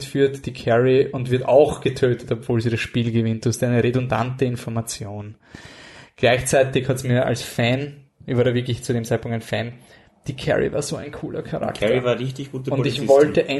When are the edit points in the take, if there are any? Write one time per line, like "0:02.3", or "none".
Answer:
none